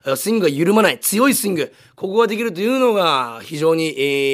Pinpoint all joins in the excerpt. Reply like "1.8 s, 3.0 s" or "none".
none